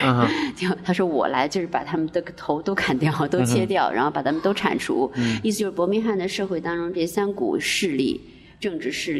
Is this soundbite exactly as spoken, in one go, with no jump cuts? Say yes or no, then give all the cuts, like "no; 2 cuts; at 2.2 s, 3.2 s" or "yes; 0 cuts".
yes; 0 cuts